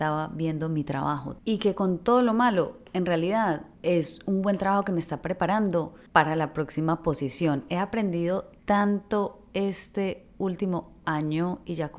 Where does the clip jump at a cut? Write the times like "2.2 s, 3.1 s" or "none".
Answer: 3.7 s, 6.1 s, 8.6 s